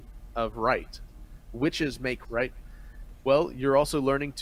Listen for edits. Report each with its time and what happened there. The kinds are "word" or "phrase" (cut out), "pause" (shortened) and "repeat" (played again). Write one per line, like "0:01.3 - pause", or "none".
0:02.2 - word

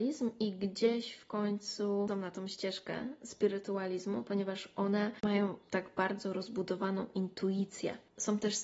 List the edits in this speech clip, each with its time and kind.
0:02.1 - word

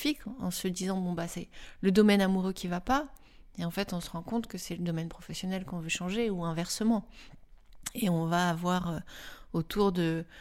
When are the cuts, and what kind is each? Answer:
none

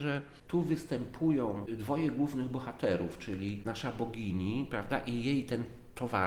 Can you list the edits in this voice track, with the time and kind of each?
none

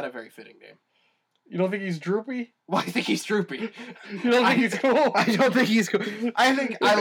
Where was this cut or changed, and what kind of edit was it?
0:02.6 - pause

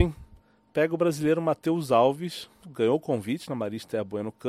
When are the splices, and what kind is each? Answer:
0:02.6 - word

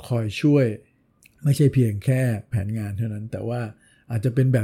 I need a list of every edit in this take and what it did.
0:02.5 - word

